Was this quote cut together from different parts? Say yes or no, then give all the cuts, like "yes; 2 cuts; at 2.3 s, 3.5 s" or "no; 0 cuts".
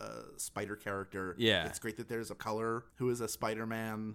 yes; 2 cuts; at 2.4 s, 2.9 s